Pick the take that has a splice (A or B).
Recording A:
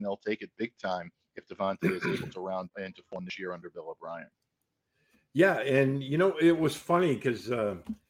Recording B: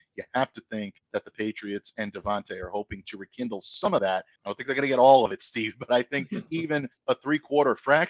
B